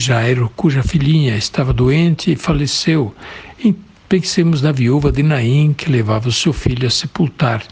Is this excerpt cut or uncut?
uncut